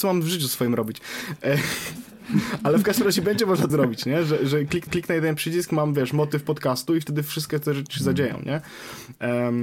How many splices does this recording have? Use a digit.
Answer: 2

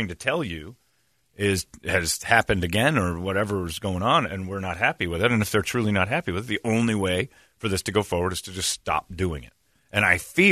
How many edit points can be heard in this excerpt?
0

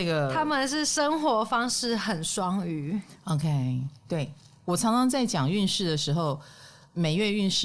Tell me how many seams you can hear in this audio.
0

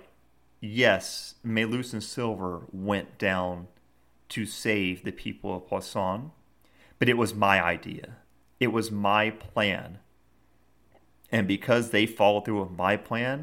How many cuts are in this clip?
0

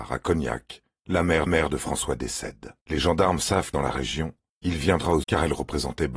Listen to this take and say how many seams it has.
5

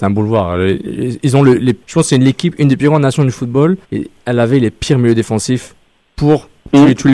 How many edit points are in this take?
2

